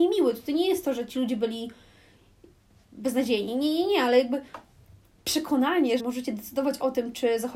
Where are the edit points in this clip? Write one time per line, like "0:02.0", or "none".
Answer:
0:06.0